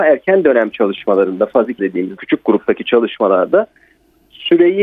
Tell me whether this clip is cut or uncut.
cut